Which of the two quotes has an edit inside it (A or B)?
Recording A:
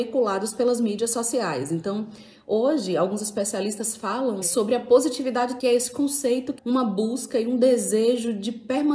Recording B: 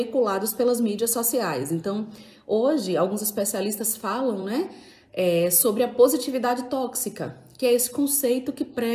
A